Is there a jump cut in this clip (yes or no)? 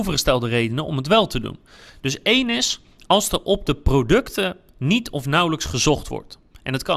no